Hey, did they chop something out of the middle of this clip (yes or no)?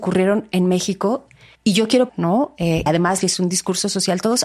yes